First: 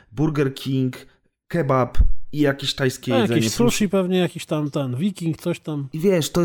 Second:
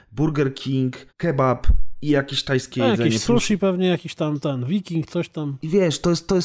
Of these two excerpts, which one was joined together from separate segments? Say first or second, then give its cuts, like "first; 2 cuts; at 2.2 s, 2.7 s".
second; 1 cut; at 1.1 s